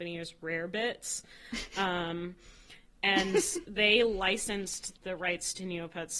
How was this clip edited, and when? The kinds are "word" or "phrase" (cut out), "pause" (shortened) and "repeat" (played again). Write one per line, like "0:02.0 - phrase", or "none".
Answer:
0:04.9 - word